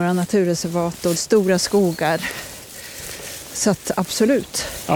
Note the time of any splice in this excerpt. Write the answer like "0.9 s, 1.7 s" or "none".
1.2 s